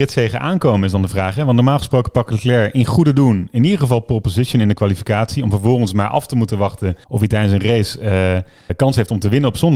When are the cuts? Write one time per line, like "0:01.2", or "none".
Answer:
0:07.0
0:08.7